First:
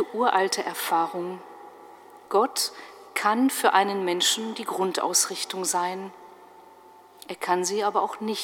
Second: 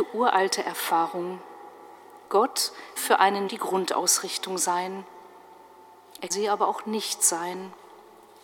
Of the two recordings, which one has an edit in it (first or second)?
second